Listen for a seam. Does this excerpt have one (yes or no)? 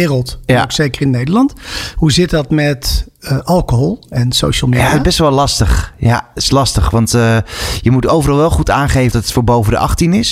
yes